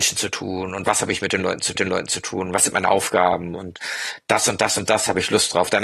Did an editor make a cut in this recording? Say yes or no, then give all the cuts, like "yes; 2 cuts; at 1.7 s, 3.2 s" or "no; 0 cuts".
yes; 1 cut; at 1.7 s